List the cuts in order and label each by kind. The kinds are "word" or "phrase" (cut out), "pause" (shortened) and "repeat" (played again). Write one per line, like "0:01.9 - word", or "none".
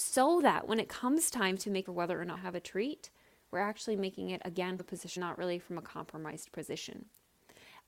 0:01.8 - phrase
0:02.3 - phrase
0:04.8 - word
0:05.2 - phrase